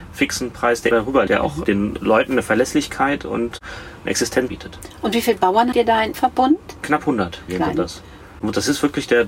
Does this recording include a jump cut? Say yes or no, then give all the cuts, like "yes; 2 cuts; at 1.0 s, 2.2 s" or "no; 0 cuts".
yes; 6 cuts; at 0.9 s, 1.3 s, 4.5 s, 5.7 s, 6.1 s, 7.5 s